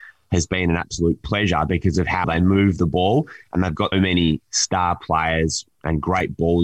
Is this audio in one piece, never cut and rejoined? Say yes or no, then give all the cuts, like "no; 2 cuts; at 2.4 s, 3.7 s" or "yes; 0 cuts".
no; 2 cuts; at 2.2 s, 3.9 s